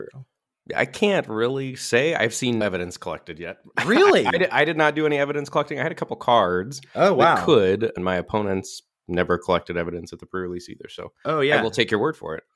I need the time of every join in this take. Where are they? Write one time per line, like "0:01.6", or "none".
0:02.6
0:08.0